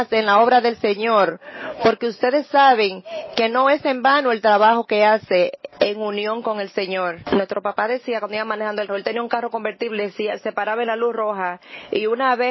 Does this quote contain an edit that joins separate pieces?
yes; 2 cuts; at 5.7 s, 8.9 s

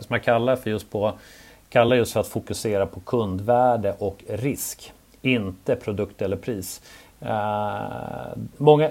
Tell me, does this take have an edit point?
no; 0 cuts

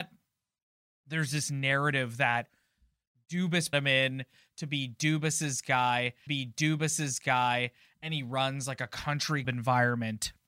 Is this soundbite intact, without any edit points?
no; 3 cuts; at 3.7 s, 6.3 s, 9.4 s

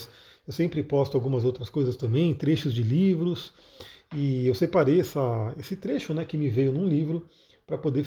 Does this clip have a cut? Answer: no; 0 cuts

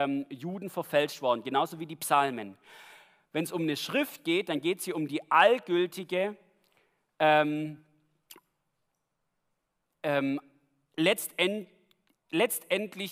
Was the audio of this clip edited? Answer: no; 0 cuts

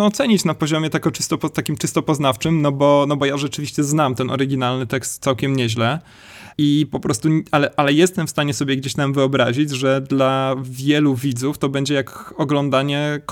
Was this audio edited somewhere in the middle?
yes; 1 cut; at 6.5 s

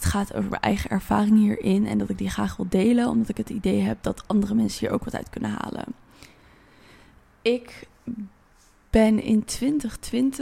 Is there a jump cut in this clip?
no; 0 cuts

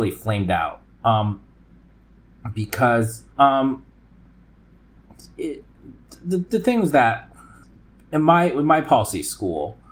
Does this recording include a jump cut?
yes; 2 cuts; at 3.3 s, 7.6 s

